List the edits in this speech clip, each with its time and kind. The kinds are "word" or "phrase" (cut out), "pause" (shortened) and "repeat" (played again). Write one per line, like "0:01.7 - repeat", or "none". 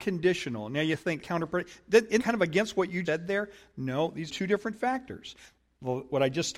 0:01.2 - word
0:02.2 - word
0:03.0 - word
0:04.3 - word